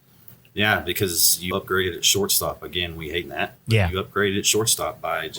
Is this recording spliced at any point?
yes; 2 cuts; at 1.5 s, 3.2 s

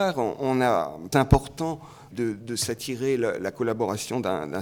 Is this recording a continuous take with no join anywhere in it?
no; 2 cuts; at 1.1 s, 2.1 s

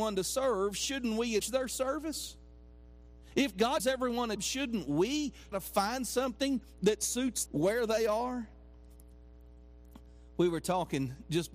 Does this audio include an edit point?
yes; 5 cuts; at 1.4 s, 3.8 s, 4.4 s, 5.5 s, 7.5 s

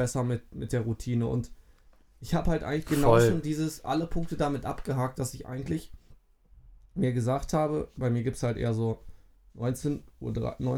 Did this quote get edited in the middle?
no; 0 cuts

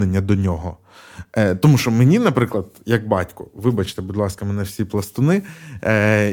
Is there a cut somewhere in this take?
no; 0 cuts

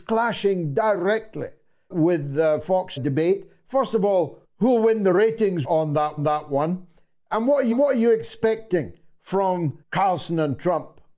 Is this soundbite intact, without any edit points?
no; 7 cuts; at 1.9 s, 3.0 s, 4.4 s, 5.6 s, 6.2 s, 7.7 s, 9.8 s

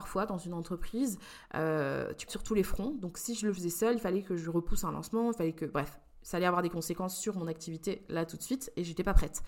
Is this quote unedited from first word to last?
no; 1 cut; at 2.3 s

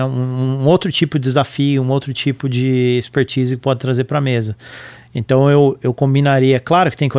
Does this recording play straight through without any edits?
yes; 0 cuts

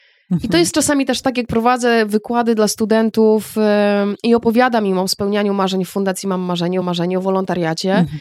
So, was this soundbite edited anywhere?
yes; 2 cuts; at 4.2 s, 6.8 s

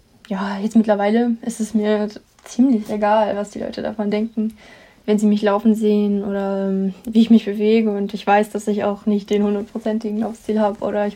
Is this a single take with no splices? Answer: yes; 0 cuts

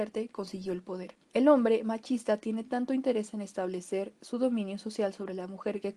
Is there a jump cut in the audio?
yes; 1 cut; at 1.2 s

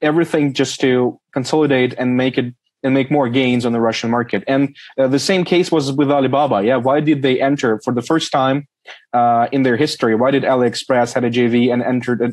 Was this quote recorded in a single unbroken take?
yes; 0 cuts

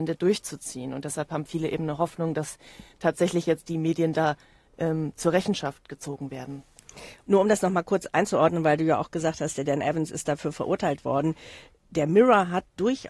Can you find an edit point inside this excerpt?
no; 0 cuts

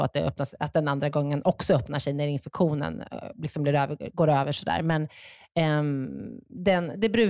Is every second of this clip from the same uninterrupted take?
yes; 0 cuts

